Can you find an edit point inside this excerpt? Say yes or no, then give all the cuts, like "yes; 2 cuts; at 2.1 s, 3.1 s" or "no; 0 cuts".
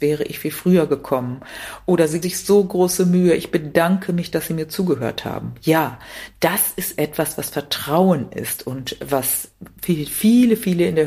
yes; 1 cut; at 2.2 s